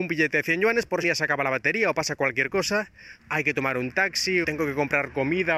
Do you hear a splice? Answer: yes; 3 cuts; at 1.0 s, 3.2 s, 4.4 s

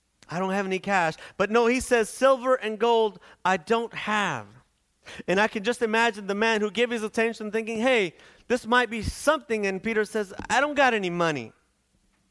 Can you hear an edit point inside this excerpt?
no; 0 cuts

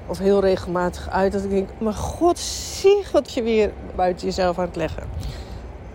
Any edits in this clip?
yes; 3 cuts; at 1.8 s, 3.3 s, 3.9 s

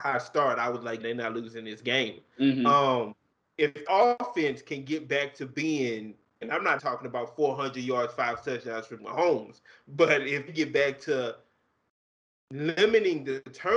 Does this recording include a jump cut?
yes; 6 cuts; at 1.0 s, 3.9 s, 6.4 s, 6.8 s, 9.0 s, 10.5 s

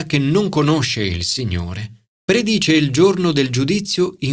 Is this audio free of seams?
no; 1 cut; at 2.1 s

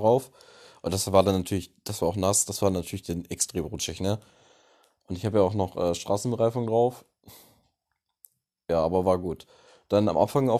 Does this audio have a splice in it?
no; 0 cuts

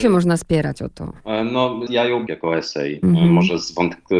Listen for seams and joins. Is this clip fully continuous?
no; 2 cuts; at 1.9 s, 2.3 s

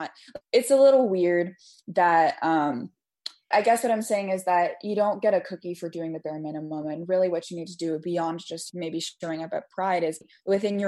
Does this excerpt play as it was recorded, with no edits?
yes; 0 cuts

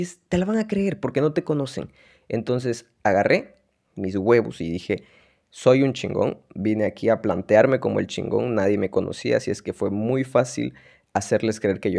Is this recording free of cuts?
yes; 0 cuts

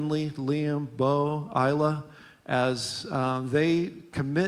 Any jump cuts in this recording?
no; 0 cuts

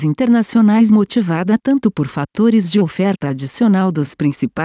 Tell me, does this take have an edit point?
no; 0 cuts

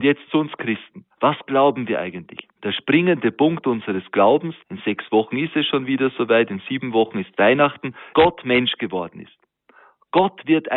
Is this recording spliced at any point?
yes; 4 cuts; at 1.1 s, 2.6 s, 4.6 s, 8.1 s

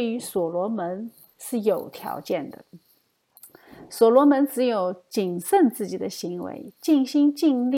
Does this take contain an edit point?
no; 0 cuts

